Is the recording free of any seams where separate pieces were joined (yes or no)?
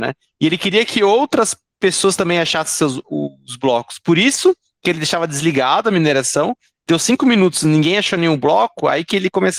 yes